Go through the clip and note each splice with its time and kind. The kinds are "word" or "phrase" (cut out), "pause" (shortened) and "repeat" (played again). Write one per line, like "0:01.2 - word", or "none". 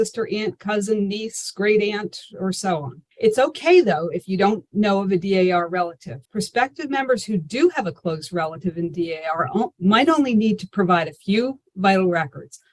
0:03.1 - pause
0:06.2 - pause